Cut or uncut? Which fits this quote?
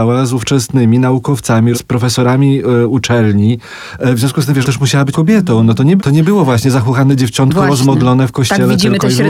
cut